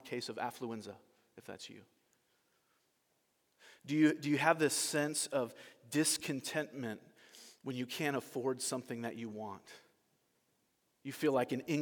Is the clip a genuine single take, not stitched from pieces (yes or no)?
yes